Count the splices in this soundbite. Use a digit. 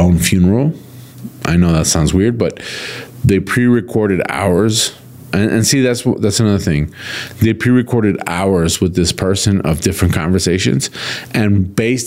0